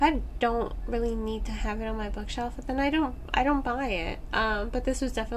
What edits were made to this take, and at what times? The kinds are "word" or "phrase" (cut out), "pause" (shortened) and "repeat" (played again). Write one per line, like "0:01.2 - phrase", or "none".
none